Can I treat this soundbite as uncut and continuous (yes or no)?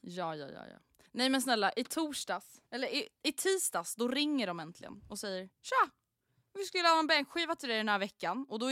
no